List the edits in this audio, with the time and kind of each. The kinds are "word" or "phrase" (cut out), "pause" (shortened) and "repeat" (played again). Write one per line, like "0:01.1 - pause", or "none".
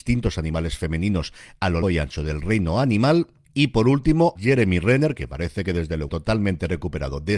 0:01.8 - word
0:04.4 - word
0:06.1 - phrase